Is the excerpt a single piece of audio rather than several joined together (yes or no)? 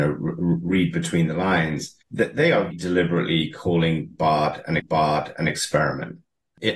no